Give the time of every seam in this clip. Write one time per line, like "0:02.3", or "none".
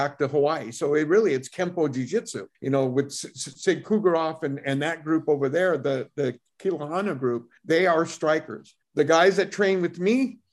0:02.5
0:07.6
0:08.8